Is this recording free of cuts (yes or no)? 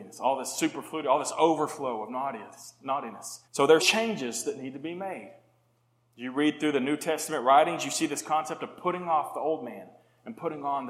no